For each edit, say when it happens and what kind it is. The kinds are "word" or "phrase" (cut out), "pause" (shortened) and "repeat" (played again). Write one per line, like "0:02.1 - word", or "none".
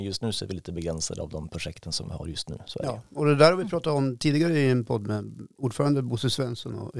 none

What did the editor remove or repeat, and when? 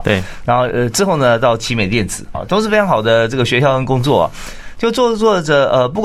0:02.3 - word

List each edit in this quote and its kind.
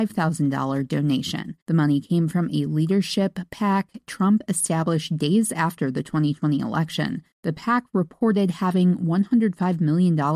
0:01.6 - pause
0:07.3 - pause

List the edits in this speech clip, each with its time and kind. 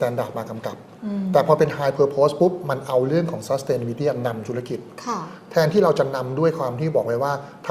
none

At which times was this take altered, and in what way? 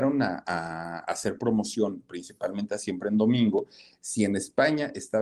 none

